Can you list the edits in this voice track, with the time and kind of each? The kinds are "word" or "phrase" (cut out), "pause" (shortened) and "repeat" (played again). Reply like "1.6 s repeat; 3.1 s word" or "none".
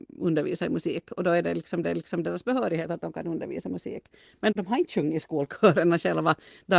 1.8 s repeat; 4.5 s word

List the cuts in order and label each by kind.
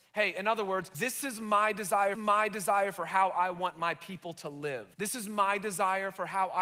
0.9 s word; 2.1 s repeat; 4.9 s pause

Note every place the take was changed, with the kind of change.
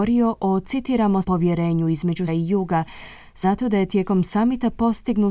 1.2 s word; 2.3 s word; 3.4 s word

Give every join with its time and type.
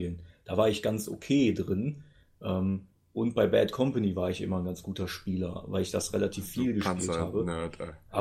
none

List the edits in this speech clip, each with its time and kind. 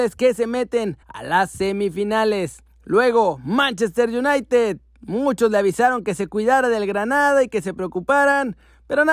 1.0 s pause; 2.7 s pause

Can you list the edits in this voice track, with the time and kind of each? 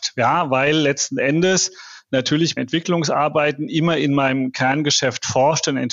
2.6 s phrase

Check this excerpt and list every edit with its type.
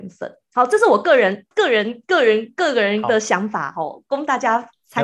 1.5 s pause

